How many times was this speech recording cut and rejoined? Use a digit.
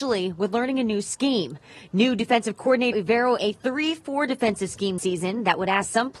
3